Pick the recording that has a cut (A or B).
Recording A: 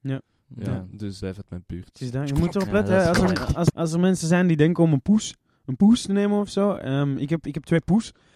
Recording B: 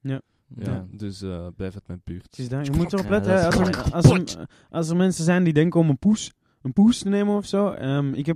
A